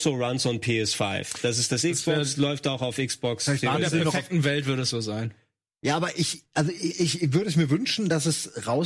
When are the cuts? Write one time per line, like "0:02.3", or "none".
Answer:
none